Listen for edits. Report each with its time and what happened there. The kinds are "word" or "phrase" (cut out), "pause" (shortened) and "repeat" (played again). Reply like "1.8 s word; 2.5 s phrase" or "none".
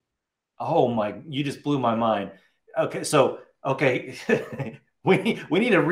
none